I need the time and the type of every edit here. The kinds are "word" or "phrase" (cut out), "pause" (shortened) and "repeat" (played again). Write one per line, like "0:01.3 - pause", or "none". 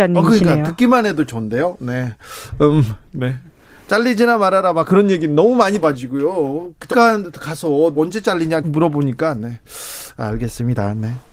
0:05.8 - word
0:06.9 - word
0:07.9 - word
0:08.6 - word

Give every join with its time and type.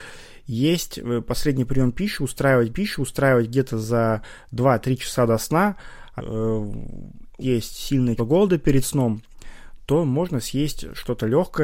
0:02.7 - repeat
0:06.2 - word
0:07.4 - word
0:08.2 - word

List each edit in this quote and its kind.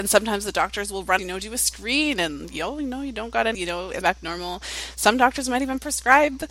0:01.2 - phrase
0:03.5 - word
0:04.0 - phrase

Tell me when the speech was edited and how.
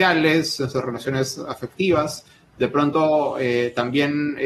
none

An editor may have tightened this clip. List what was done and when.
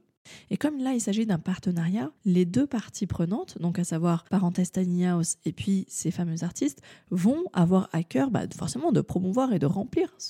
0:02.2 - pause
0:04.3 - pause

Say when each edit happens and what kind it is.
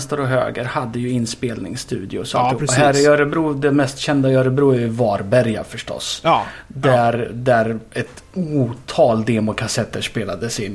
0:08.3 - pause

